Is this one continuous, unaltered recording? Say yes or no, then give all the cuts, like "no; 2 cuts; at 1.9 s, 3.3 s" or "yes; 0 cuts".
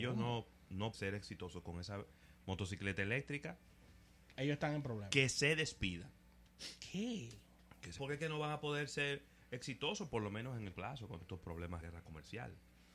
no; 6 cuts; at 0.9 s, 4.3 s, 8.0 s, 10.7 s, 11.2 s, 11.8 s